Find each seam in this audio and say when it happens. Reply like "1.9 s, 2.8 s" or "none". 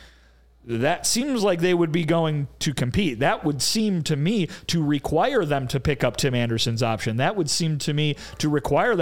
none